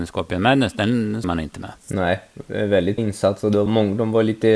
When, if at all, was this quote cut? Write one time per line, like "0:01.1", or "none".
0:01.2
0:01.8
0:03.0
0:03.7